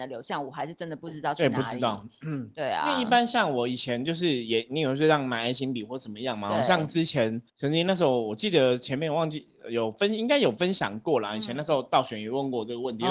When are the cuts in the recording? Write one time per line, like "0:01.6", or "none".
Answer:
0:07.5